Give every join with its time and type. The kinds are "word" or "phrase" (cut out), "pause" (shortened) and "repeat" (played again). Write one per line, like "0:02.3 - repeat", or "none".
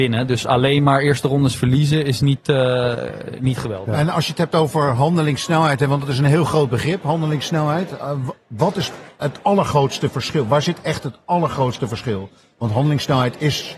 none